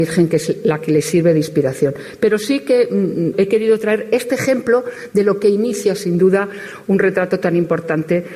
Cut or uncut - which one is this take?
cut